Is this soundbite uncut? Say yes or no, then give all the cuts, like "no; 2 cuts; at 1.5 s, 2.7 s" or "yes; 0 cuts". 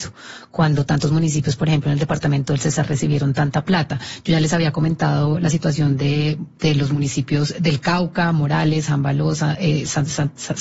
yes; 0 cuts